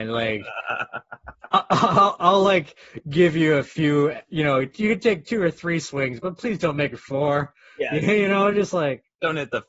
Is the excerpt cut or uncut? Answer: uncut